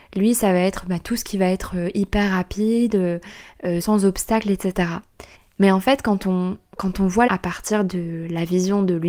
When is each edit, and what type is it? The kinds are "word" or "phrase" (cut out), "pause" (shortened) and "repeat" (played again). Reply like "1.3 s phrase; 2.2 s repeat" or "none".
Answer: 3.8 s word; 5.3 s pause; 7.3 s phrase